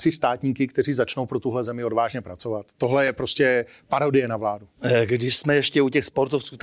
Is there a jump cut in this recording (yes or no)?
no